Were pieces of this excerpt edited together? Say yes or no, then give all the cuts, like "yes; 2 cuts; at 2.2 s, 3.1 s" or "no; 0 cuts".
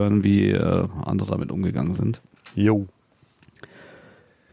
no; 0 cuts